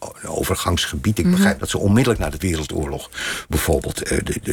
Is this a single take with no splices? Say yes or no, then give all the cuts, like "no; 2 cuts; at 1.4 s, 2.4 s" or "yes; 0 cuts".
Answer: no; 2 cuts; at 1.6 s, 2.4 s